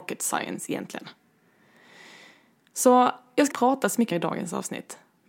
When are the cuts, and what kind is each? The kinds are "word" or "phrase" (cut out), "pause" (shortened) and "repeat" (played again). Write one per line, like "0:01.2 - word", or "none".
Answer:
0:03.5 - word
0:04.1 - word